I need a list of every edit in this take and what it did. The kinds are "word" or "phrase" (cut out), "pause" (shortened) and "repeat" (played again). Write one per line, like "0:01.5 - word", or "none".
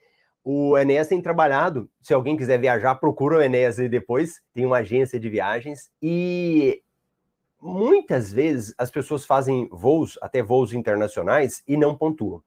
0:04.5 - pause
0:05.9 - pause